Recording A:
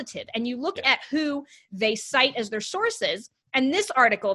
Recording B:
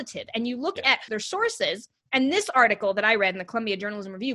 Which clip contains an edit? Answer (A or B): B